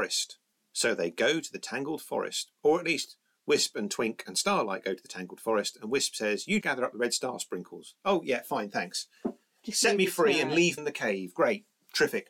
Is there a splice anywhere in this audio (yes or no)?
yes